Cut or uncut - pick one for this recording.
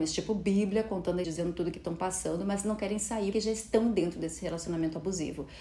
cut